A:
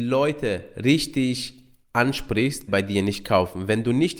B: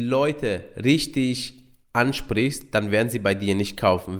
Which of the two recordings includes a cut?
A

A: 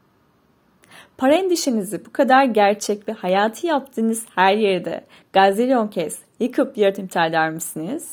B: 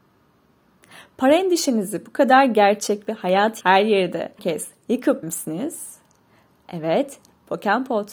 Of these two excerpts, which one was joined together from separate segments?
B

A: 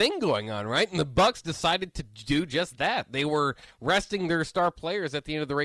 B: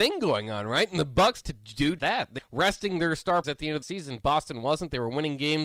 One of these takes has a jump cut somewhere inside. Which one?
B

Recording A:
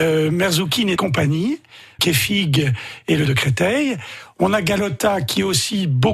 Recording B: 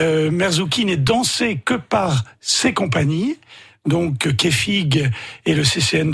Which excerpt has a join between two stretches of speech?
A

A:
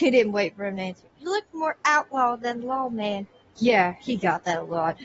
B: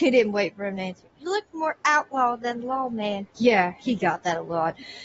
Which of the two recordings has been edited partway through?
B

